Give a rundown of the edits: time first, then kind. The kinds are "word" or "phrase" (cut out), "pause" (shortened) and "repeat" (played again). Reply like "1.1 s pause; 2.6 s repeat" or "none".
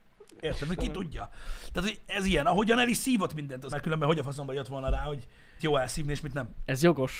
2.0 s word; 3.7 s word; 5.6 s word